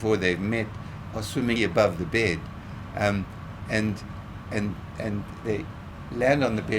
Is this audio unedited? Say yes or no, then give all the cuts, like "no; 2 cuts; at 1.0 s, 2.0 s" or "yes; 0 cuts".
no; 3 cuts; at 1.6 s, 4.4 s, 5.4 s